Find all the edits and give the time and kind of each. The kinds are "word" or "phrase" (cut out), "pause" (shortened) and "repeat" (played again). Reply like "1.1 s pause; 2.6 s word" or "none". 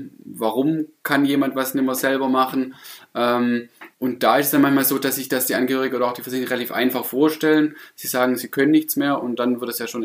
3.9 s pause

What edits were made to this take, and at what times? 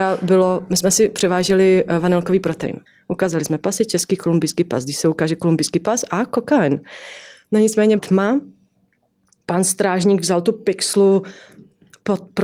2.9 s pause; 8.0 s word

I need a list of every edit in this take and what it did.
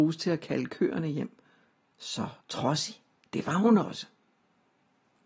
2.4 s pause

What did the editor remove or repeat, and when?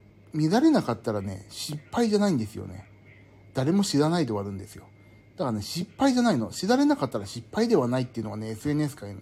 none

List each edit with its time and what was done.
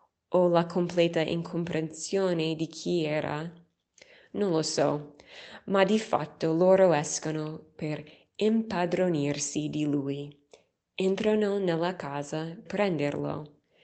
12.7 s word

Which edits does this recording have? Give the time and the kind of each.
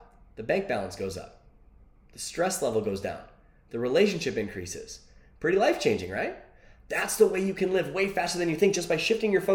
none

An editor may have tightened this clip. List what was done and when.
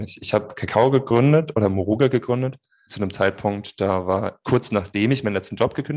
2.9 s word; 4.4 s word

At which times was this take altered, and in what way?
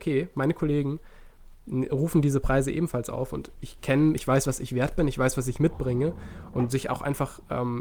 none

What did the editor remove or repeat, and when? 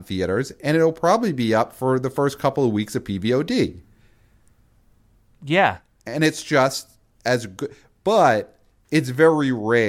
none

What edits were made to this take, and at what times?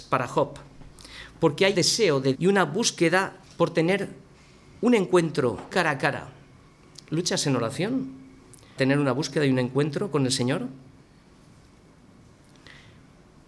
1.7 s word; 2.3 s word; 3.4 s word; 5.7 s word; 8.8 s word

